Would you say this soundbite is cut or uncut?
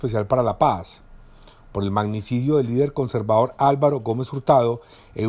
uncut